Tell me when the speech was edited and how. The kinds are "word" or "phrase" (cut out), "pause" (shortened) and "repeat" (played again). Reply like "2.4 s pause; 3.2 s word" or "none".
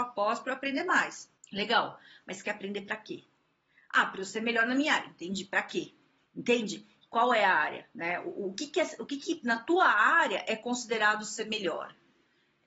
1.4 s pause